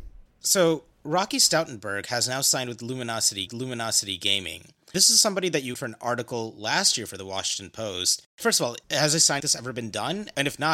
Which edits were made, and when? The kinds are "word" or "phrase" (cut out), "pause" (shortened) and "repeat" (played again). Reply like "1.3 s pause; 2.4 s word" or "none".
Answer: 0.9 s pause; 3.5 s repeat; 5.7 s word; 9.4 s word